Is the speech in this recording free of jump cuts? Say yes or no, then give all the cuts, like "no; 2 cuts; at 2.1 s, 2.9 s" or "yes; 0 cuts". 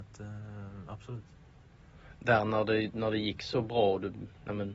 yes; 0 cuts